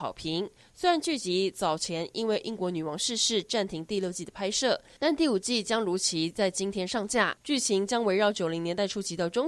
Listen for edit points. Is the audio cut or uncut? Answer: uncut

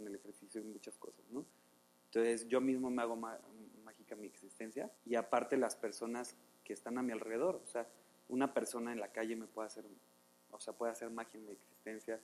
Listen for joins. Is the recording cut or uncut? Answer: cut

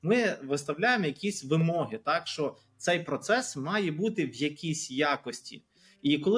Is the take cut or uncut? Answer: uncut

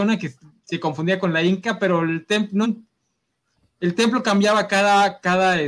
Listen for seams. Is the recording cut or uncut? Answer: cut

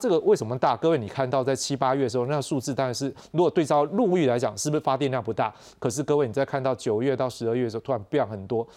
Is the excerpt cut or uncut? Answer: uncut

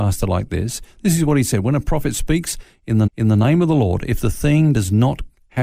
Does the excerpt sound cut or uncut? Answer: cut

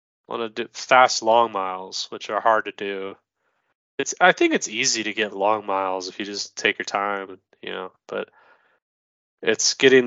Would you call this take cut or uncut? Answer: cut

